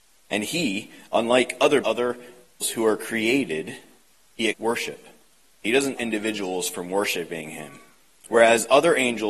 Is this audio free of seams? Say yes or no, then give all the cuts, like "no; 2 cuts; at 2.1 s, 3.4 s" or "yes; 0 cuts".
no; 4 cuts; at 1.8 s, 2.6 s, 4.5 s, 6.0 s